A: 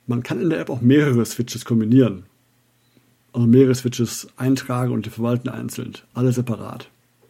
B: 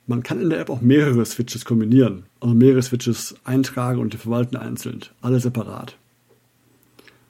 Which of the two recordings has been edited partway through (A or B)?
B